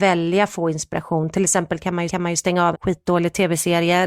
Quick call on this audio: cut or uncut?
cut